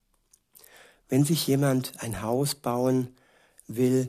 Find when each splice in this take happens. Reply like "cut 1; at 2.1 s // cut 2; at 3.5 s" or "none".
none